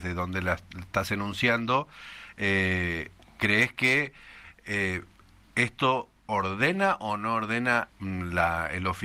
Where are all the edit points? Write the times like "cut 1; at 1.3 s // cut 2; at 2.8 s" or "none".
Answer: cut 1; at 7.9 s